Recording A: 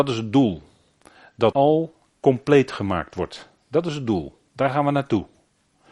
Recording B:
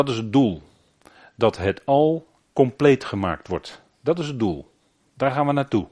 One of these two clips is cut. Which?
A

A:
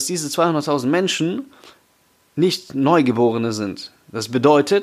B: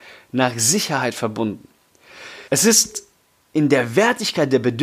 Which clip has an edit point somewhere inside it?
B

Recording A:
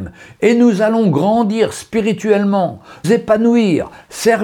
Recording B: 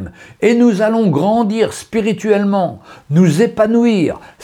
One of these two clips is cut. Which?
A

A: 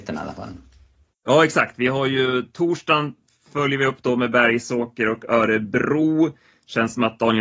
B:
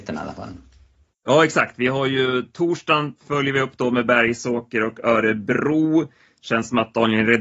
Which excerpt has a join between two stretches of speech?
B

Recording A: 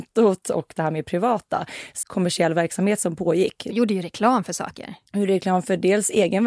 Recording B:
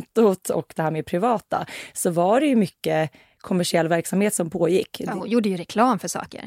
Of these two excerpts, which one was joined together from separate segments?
A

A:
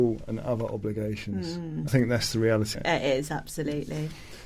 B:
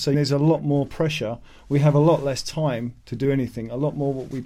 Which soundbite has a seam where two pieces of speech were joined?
A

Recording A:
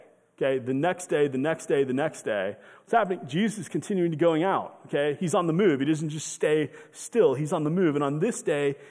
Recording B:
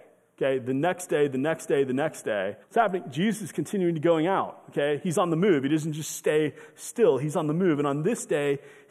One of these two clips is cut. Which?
B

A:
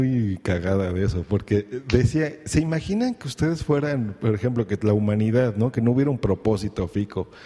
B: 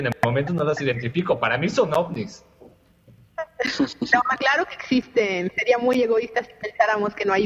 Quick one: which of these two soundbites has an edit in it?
B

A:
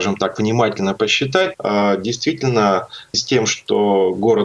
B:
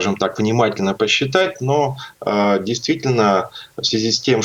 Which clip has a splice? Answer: A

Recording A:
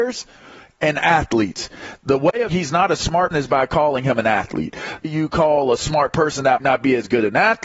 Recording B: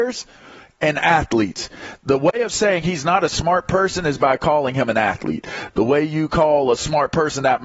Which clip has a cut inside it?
A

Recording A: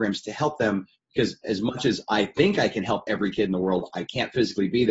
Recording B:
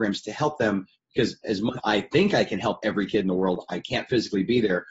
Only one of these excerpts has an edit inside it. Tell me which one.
B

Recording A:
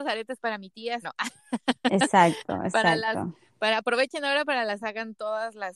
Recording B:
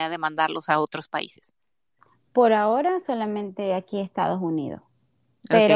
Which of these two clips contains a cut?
A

